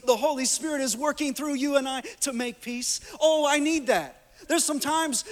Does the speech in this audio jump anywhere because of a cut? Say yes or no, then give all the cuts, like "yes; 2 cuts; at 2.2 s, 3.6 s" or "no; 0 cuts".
no; 0 cuts